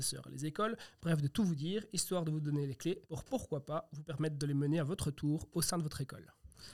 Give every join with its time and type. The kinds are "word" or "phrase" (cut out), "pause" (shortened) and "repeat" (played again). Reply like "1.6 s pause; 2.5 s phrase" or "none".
3.0 s pause